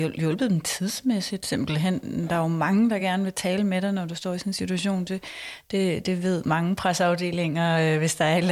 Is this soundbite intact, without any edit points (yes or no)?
yes